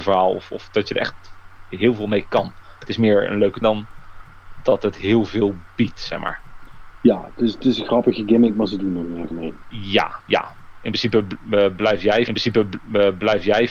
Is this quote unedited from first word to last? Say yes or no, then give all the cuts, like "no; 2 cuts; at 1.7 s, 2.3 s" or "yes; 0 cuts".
no; 3 cuts; at 3.6 s, 9.3 s, 12.3 s